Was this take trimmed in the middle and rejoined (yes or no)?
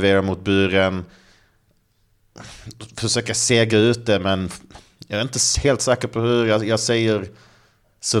no